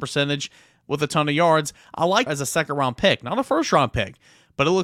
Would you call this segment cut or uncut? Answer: cut